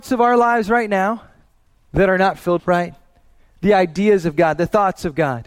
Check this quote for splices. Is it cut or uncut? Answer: cut